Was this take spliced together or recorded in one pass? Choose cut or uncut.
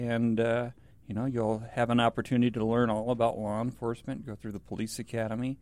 uncut